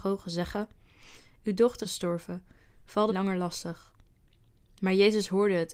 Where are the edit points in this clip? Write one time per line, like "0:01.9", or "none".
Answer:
0:01.8
0:03.1